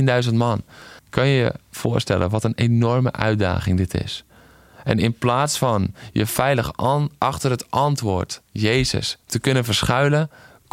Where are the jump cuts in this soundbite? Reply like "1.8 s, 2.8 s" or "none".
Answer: 1.0 s, 8.5 s